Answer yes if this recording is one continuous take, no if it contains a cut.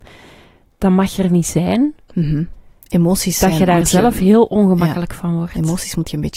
yes